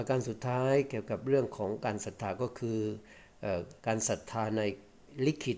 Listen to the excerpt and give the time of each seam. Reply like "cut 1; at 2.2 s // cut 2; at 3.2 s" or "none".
cut 1; at 3.8 s